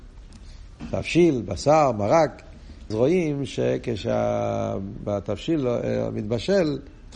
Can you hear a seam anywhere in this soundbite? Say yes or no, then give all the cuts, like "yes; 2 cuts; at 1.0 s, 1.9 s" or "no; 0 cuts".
yes; 1 cut; at 2.9 s